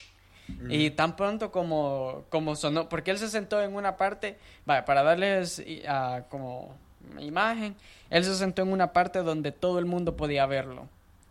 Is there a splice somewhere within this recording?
no; 0 cuts

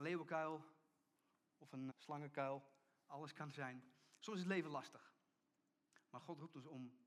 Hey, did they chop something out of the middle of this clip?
yes; 1 cut; at 1.9 s

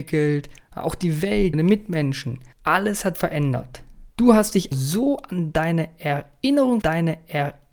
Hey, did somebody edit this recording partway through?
yes; 6 cuts; at 1.5 s, 2.5 s, 3.1 s, 4.1 s, 4.7 s, 6.8 s

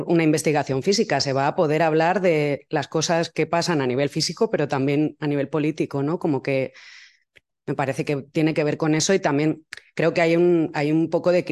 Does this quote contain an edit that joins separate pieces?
no; 0 cuts

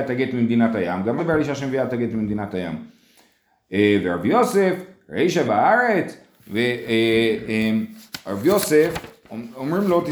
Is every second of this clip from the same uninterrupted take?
no; 2 cuts; at 1.2 s, 5.5 s

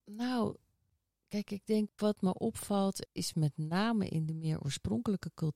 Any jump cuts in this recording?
no; 0 cuts

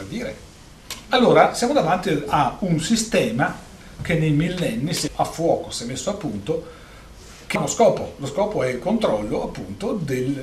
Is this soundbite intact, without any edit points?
no; 2 cuts; at 5.1 s, 7.6 s

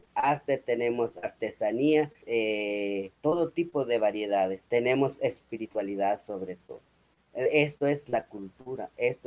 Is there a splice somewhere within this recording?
yes; 3 cuts; at 2.2 s, 3.1 s, 4.7 s

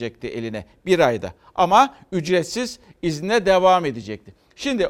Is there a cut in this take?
no; 0 cuts

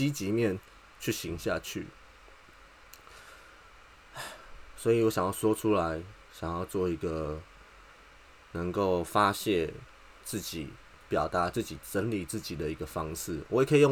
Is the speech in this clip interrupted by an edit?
no; 0 cuts

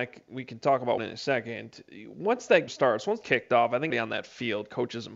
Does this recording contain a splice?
yes; 4 cuts; at 1.0 s, 2.7 s, 3.2 s, 3.9 s

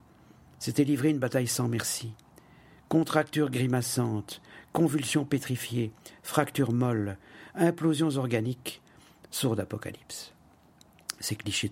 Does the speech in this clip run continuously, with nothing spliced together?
yes; 0 cuts

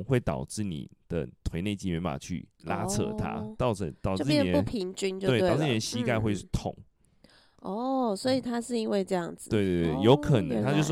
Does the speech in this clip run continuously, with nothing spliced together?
no; 1 cut; at 2.5 s

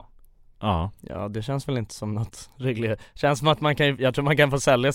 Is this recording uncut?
yes; 0 cuts

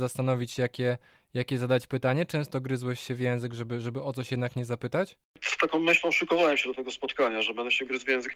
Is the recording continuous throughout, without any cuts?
yes; 0 cuts

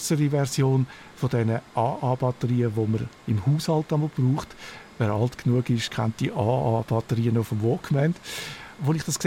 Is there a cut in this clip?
no; 0 cuts

